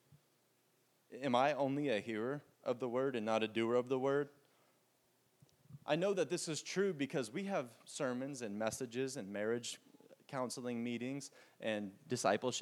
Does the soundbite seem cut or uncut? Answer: cut